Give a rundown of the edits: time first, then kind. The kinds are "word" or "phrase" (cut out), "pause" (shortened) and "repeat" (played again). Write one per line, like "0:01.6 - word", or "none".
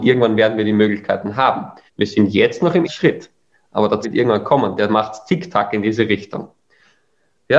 0:01.9 - pause
0:02.8 - word
0:04.0 - word